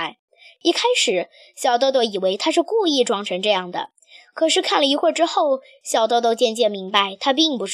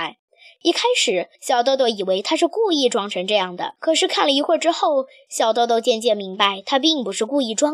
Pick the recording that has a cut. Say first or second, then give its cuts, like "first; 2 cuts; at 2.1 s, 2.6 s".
second; 2 cuts; at 1.3 s, 3.8 s